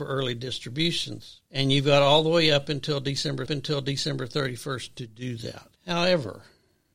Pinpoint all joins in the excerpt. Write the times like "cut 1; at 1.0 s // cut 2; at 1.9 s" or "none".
cut 1; at 1.5 s // cut 2; at 3.5 s // cut 3; at 5.8 s